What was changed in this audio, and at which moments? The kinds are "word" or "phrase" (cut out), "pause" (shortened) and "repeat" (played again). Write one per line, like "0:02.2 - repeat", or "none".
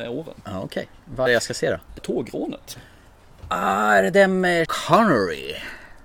0:01.3 - word
0:02.0 - word
0:04.6 - word